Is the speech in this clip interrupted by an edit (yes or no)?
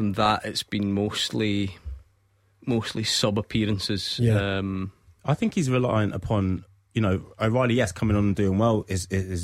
no